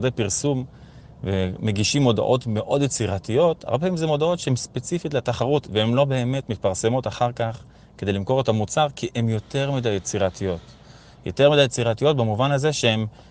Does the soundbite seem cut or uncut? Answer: uncut